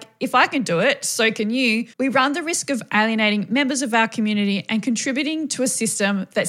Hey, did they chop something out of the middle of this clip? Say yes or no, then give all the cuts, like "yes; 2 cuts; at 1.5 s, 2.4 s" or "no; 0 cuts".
yes; 1 cut; at 1.9 s